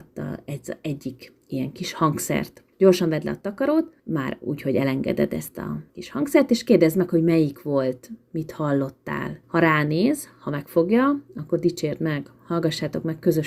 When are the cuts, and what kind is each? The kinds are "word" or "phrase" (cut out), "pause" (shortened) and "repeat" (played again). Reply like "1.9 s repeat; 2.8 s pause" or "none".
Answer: 2.7 s pause; 4.0 s pause; 5.9 s pause; 9.4 s pause